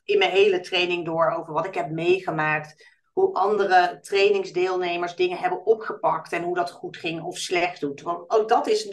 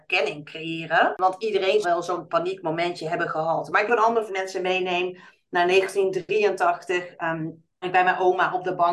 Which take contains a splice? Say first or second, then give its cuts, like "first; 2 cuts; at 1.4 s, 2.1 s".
second; 5 cuts; at 1.8 s, 2.3 s, 3.9 s, 4.3 s, 7.8 s